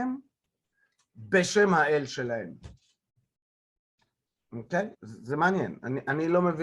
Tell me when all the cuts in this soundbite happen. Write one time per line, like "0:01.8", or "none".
0:04.9